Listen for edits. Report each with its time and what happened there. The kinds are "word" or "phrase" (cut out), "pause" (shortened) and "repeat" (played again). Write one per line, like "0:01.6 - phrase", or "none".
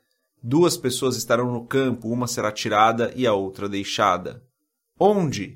none